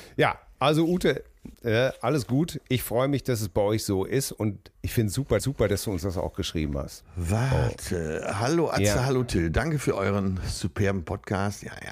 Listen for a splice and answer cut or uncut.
cut